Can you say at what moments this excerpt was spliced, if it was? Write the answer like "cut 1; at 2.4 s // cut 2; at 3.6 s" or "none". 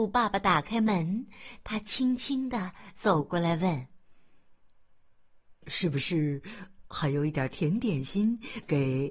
cut 1; at 4.6 s